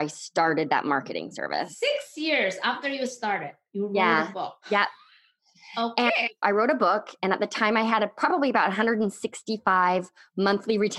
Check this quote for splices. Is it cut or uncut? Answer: cut